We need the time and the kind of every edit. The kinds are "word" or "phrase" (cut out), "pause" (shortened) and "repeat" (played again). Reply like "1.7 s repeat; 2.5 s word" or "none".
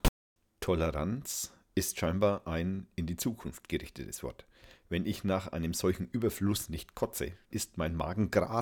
7.5 s word